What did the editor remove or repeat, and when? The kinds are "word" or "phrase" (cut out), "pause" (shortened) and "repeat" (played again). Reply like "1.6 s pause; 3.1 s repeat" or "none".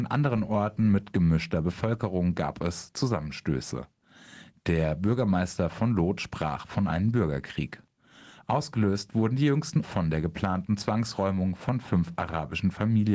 9.8 s word

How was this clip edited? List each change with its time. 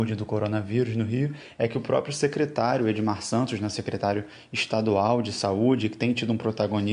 none

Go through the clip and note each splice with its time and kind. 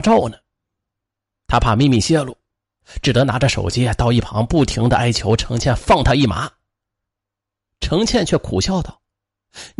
none

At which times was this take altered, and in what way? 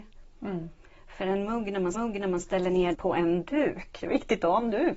1.9 s repeat; 2.9 s word

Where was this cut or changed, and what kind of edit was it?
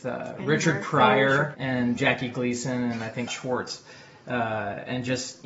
1.5 s word; 2.0 s word; 3.3 s word

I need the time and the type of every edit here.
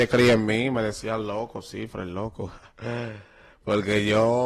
none

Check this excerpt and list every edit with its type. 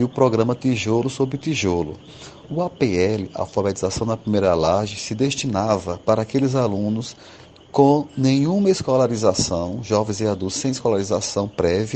none

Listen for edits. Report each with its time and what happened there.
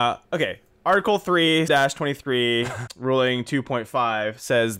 1.7 s word; 2.9 s word

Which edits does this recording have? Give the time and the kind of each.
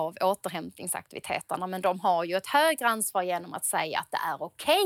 none

